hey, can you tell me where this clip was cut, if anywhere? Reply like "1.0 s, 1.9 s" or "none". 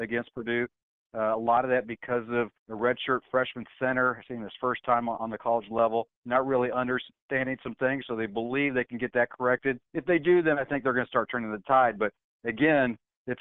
2.6 s, 6.1 s, 9.8 s